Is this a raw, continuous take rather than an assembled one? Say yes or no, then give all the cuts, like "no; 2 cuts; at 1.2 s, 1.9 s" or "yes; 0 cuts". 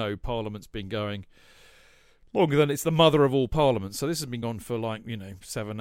no; 1 cut; at 4.4 s